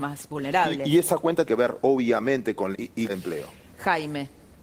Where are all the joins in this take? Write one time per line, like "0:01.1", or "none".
0:01.5
0:02.7
0:03.1

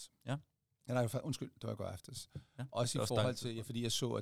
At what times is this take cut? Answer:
none

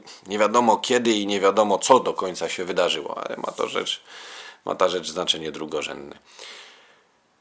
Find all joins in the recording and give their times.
none

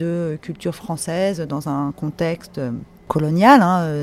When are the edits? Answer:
none

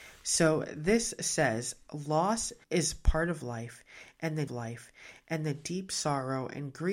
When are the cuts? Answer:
0:02.6
0:04.5

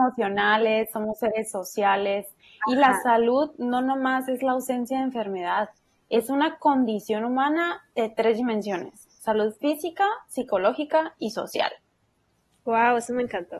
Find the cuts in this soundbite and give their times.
none

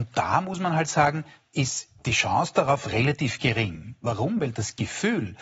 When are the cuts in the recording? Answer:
none

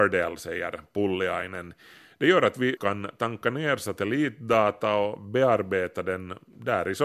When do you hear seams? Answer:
0:02.8

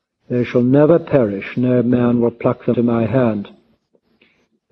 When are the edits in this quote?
0:02.7

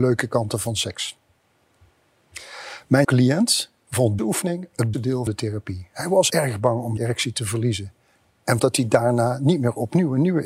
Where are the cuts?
0:03.0
0:04.2
0:04.9
0:05.3
0:06.3
0:07.0
0:08.6

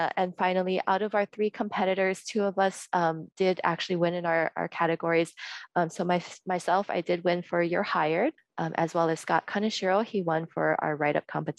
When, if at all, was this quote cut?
0:08.4

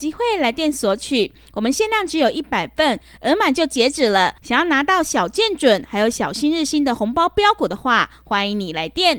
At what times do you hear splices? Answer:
0:04.4

